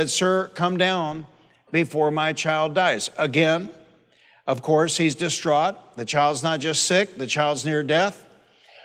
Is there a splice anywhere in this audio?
no; 0 cuts

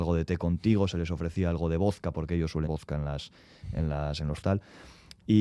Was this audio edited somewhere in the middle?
yes; 2 cuts; at 2.7 s, 4.4 s

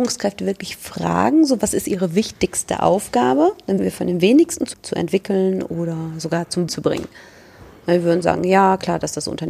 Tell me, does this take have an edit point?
yes; 3 cuts; at 3.8 s, 4.7 s, 6.7 s

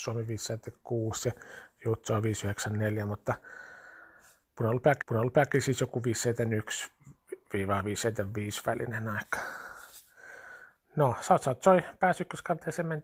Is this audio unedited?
no; 1 cut; at 5.0 s

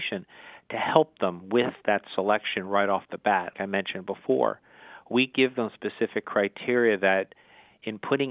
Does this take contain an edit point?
yes; 1 cut; at 3.5 s

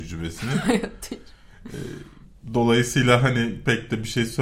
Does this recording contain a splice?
no; 0 cuts

